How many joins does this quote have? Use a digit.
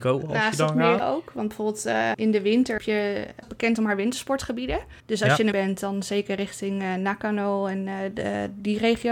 6